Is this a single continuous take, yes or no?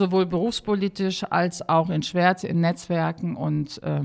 yes